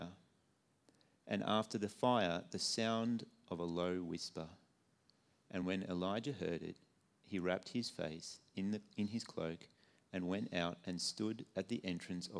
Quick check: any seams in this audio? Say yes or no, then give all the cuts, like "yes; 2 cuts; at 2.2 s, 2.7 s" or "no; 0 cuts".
no; 0 cuts